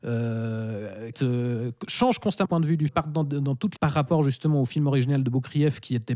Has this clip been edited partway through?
yes; 4 cuts; at 1.1 s, 2.4 s, 2.9 s, 3.8 s

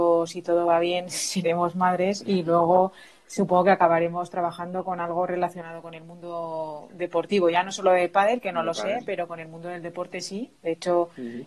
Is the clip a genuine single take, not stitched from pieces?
yes; 0 cuts

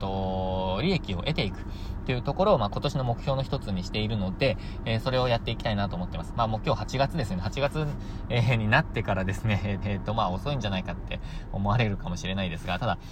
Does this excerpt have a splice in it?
yes; 1 cut; at 9.8 s

